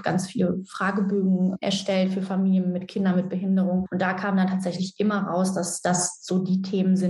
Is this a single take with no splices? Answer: yes; 0 cuts

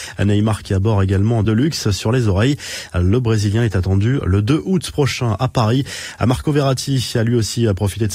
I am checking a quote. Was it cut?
yes; 1 cut; at 1.4 s

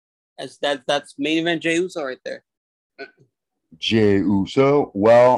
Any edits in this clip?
no; 0 cuts

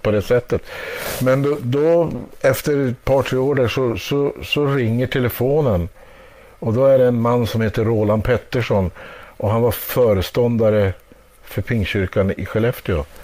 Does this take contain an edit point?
no; 0 cuts

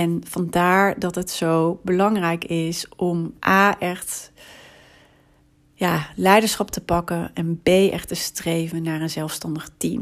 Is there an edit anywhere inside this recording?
yes; 1 cut; at 3.4 s

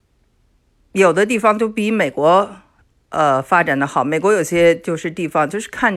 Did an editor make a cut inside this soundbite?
no; 0 cuts

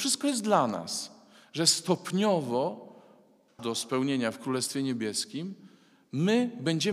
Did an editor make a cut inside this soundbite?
yes; 1 cut; at 3.6 s

